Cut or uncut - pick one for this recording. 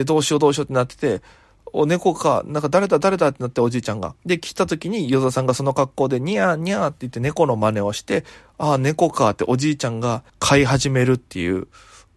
cut